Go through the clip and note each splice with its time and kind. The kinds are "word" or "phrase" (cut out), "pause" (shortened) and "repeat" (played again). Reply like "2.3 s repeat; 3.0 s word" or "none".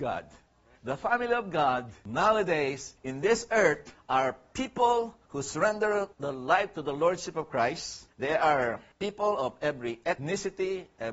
5.3 s pause; 6.1 s pause